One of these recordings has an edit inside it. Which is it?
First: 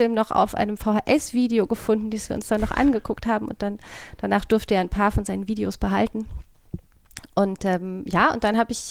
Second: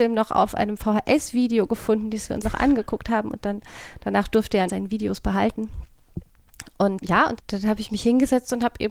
second; 4 cuts; at 2.4 s, 4.7 s, 7.0 s, 7.4 s

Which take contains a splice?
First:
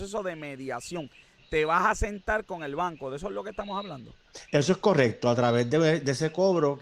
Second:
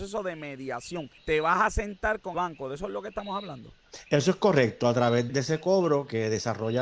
second; 3 cuts; at 1.2 s, 2.3 s, 5.3 s

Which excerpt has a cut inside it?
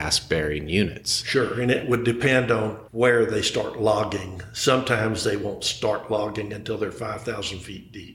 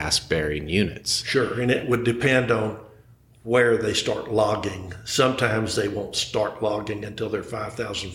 first; 1 cut; at 2.9 s

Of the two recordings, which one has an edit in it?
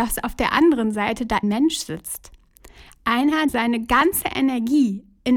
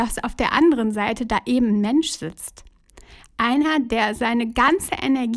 first; 2 cuts; at 1.4 s, 3.5 s

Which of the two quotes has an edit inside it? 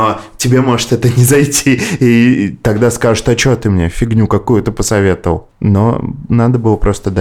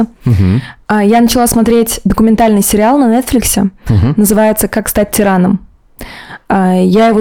first; 1 cut; at 5.5 s

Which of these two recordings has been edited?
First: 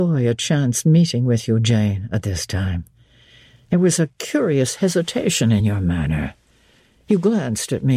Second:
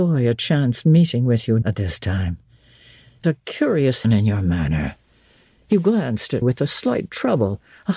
second; 4 cuts; at 1.6 s, 3.2 s, 4.0 s, 6.4 s

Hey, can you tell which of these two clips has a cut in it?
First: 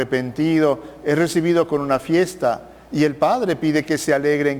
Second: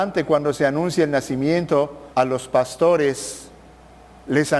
second; 1 cut; at 2.1 s

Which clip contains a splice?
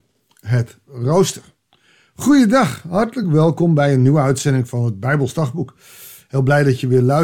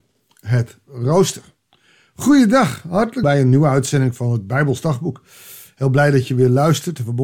second; 1 cut; at 3.2 s

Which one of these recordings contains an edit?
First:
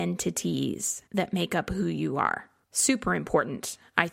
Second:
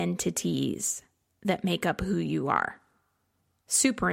first; 2 cuts; at 1.1 s, 2.6 s

